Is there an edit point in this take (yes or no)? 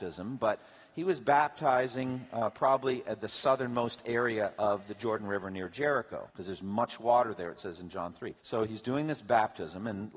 yes